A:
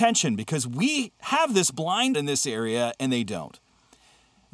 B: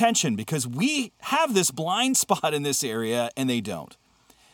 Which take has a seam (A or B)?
A